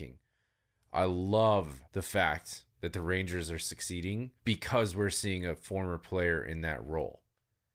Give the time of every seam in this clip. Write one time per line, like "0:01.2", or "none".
0:01.9
0:02.7
0:04.4